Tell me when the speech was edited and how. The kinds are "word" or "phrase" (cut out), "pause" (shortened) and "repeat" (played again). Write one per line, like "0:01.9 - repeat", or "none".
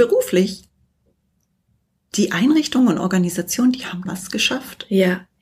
0:04.1 - phrase